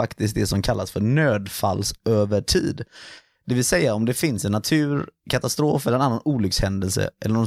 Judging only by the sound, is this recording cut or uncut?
uncut